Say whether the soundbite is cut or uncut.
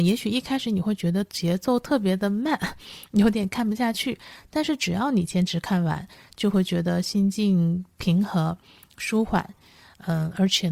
uncut